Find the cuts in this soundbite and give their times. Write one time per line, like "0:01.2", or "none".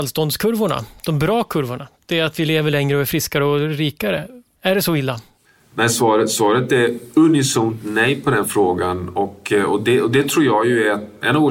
none